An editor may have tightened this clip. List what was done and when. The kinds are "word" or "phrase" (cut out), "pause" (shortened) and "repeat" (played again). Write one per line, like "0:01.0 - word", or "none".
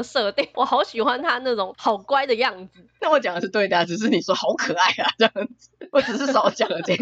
none